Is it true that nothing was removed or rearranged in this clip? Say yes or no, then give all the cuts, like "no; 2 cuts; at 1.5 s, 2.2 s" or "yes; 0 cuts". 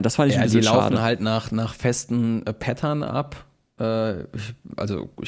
yes; 0 cuts